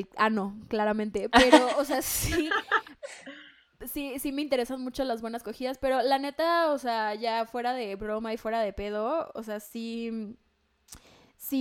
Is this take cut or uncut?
uncut